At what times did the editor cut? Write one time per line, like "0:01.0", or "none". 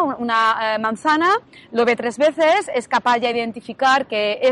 none